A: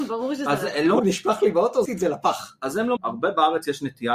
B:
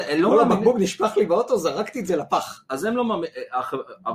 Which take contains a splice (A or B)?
A